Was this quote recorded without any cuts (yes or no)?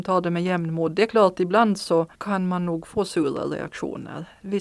no